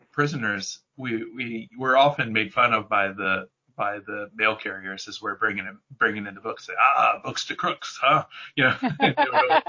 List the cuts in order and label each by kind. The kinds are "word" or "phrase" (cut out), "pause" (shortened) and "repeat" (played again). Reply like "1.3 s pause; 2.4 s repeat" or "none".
none